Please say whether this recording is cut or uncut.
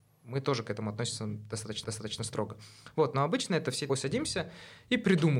cut